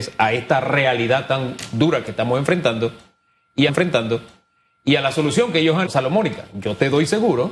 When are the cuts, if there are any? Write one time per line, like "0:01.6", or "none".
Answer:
0:03.7
0:05.9

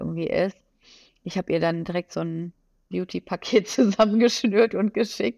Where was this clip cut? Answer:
none

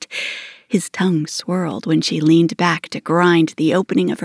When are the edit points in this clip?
none

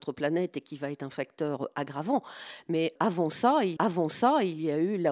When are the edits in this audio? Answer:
0:03.8

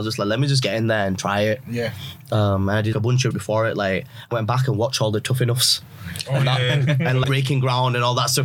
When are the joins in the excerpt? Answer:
0:02.9
0:03.3
0:04.3
0:07.2

